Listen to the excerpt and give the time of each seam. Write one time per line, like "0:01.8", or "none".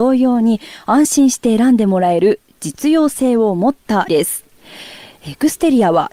0:04.1